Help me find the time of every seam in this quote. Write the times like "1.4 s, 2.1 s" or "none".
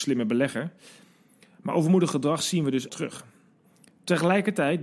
2.9 s

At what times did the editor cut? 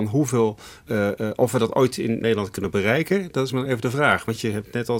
none

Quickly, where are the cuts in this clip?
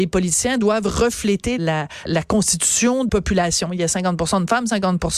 1.6 s, 2.0 s, 3.1 s

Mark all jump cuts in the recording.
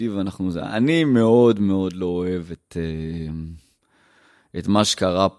none

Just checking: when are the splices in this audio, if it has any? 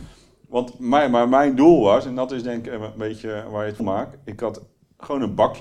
3.8 s

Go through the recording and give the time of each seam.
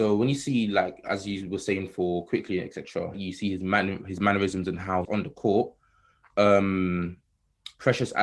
3.1 s, 5.0 s

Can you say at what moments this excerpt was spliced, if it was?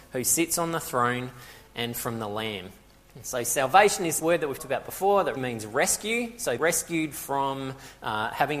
4.2 s, 4.6 s, 5.4 s, 6.6 s

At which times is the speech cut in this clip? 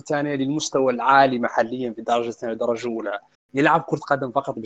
3.3 s

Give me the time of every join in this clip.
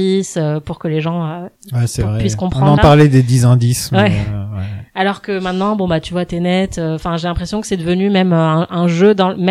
2.8 s

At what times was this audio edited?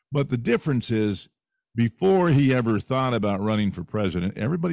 none

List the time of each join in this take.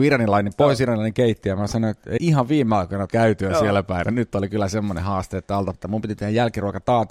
2.2 s, 3.1 s, 4.0 s, 5.7 s

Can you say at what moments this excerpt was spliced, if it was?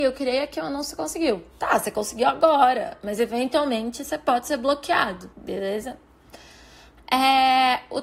5.3 s

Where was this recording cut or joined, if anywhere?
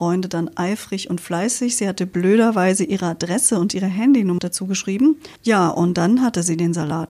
4.4 s, 5.4 s

